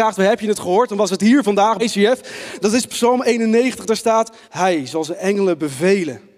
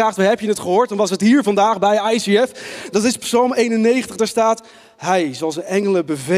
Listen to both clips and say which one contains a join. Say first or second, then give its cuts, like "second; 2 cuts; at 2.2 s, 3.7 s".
first; 2 cuts; at 1.8 s, 4.4 s